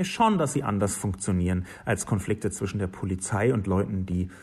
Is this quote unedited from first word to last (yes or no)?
yes